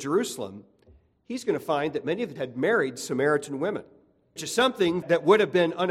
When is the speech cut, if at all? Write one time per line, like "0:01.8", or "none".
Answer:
0:02.4
0:04.4
0:05.0